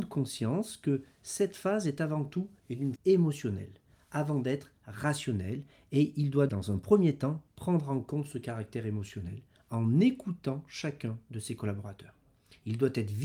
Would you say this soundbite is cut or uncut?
cut